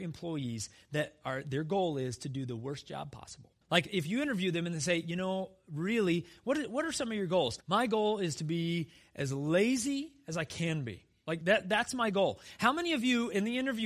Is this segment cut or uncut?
cut